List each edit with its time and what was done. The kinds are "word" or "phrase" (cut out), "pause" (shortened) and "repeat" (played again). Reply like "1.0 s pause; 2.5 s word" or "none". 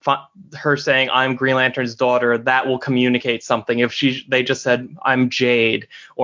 none